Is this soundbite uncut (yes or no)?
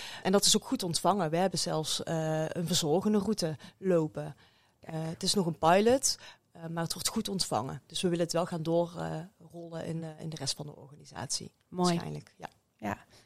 yes